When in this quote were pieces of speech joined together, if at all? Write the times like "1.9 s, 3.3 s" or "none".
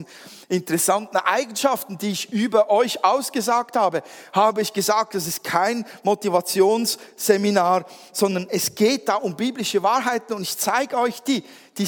none

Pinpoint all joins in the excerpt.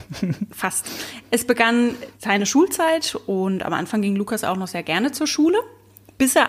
2.1 s

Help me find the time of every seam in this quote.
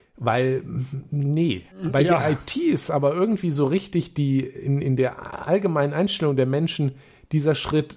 1.7 s

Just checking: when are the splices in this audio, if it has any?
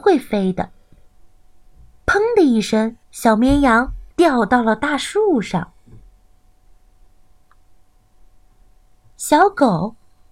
3.0 s, 4.1 s

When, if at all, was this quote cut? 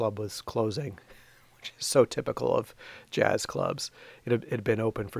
none

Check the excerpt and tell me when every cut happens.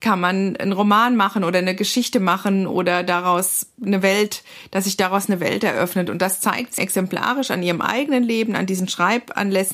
6.8 s

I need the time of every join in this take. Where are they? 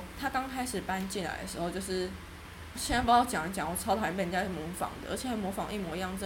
2.7 s

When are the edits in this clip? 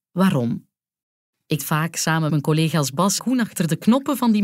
1.6 s, 2.3 s, 3.2 s

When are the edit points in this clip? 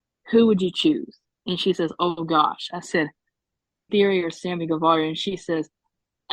3.9 s

